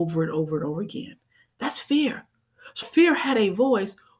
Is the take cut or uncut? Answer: cut